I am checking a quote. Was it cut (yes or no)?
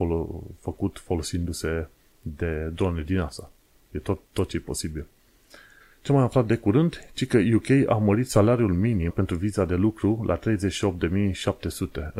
yes